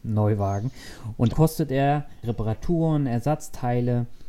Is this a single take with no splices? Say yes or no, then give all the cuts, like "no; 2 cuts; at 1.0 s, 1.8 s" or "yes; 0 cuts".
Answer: no; 2 cuts; at 1.3 s, 2.2 s